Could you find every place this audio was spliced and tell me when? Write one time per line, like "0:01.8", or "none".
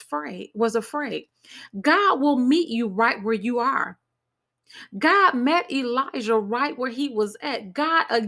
none